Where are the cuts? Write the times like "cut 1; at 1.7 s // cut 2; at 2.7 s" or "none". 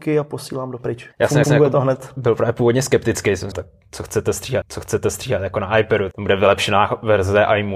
cut 1; at 1.1 s // cut 2; at 1.4 s // cut 3; at 3.5 s // cut 4; at 4.6 s // cut 5; at 6.1 s